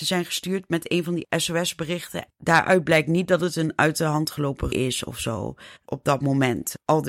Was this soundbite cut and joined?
yes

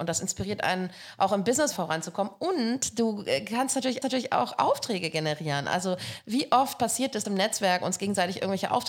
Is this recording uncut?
no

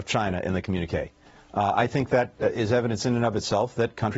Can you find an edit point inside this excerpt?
no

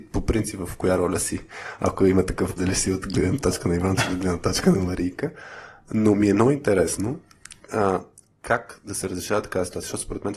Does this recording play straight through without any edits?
no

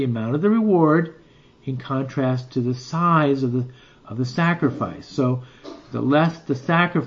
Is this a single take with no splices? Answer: yes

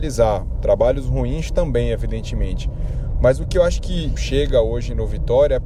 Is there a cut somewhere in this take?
yes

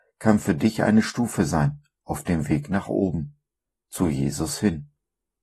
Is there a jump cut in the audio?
no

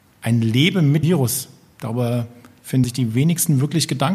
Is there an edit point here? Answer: yes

